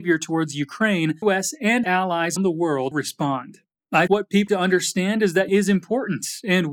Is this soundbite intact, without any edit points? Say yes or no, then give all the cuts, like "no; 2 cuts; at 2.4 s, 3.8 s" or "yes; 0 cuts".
no; 7 cuts; at 1.2 s, 1.8 s, 2.4 s, 2.9 s, 4.1 s, 4.5 s, 5.5 s